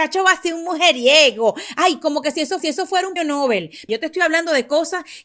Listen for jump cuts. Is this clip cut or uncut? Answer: cut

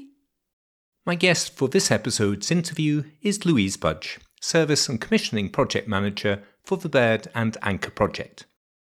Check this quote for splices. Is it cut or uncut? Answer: uncut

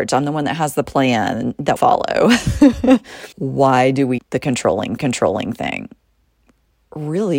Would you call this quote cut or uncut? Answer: cut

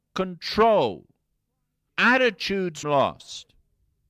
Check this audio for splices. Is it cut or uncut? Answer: cut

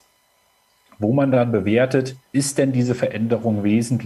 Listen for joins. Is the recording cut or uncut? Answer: cut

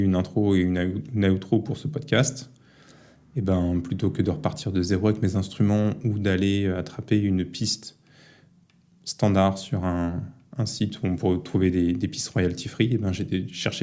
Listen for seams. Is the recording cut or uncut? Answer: uncut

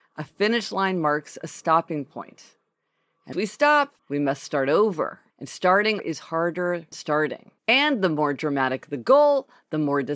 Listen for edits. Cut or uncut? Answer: cut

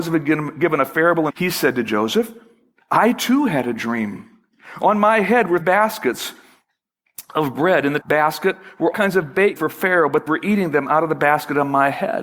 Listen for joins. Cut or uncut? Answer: cut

